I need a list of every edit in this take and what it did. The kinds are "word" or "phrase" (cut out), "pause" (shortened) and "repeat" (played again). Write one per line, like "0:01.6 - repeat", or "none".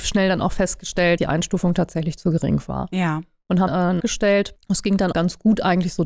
0:01.2 - word
0:03.7 - word
0:04.0 - word
0:05.1 - word